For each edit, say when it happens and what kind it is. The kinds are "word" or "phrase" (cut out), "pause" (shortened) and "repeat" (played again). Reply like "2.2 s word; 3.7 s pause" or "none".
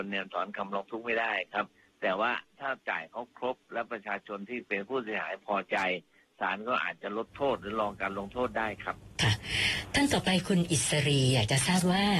none

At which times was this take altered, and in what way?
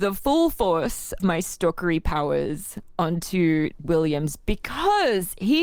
1.2 s word; 3.8 s word

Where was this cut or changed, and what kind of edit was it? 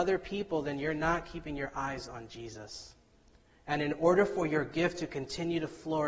none

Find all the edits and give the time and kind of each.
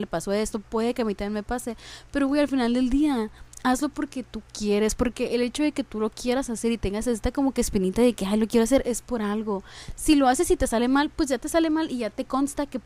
none

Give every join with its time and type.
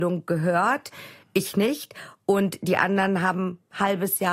none

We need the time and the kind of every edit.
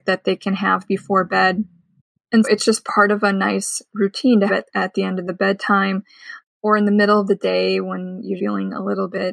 2.4 s word; 4.5 s word; 8.4 s word

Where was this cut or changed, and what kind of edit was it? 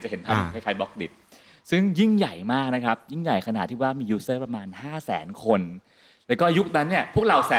none

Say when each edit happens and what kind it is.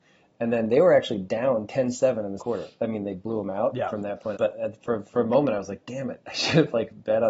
2.4 s word; 4.3 s word

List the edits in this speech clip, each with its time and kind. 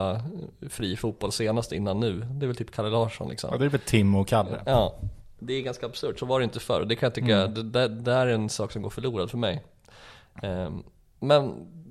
none

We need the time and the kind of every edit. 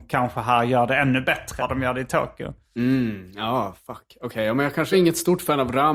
1.6 s word; 4.9 s word

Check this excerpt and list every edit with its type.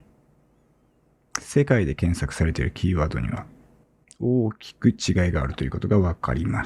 3.8 s pause

